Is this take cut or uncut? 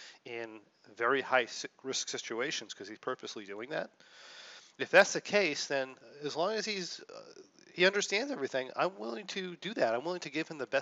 uncut